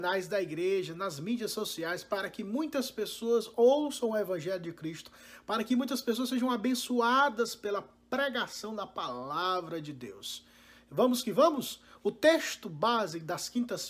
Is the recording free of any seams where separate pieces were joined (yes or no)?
yes